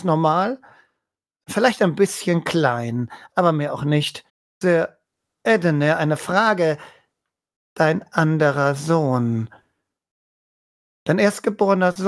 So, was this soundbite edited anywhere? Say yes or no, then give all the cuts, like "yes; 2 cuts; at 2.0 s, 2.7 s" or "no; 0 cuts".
no; 0 cuts